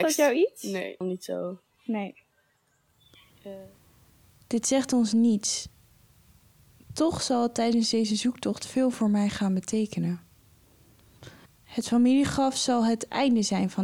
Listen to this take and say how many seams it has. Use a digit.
2